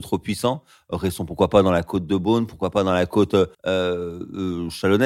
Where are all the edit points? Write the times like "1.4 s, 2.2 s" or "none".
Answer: 3.5 s